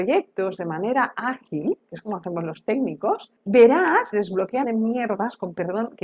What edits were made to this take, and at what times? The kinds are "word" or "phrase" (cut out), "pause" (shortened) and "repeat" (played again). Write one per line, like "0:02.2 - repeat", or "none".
0:04.1 - phrase
0:04.6 - phrase

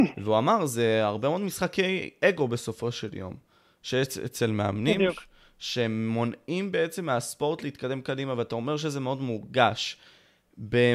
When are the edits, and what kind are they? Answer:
none

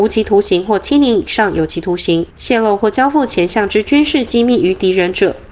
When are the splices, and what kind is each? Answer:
0:02.3 - pause

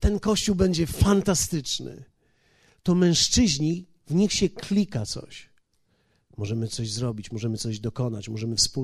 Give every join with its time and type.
none

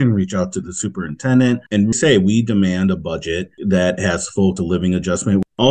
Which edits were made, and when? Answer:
0:01.7 - pause
0:04.6 - word

